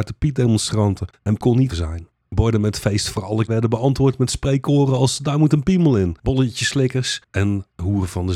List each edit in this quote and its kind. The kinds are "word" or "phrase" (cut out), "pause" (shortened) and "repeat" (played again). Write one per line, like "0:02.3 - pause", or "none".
0:01.4 - word
0:01.7 - word
0:03.5 - word